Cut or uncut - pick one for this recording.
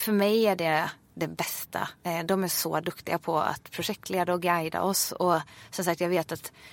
cut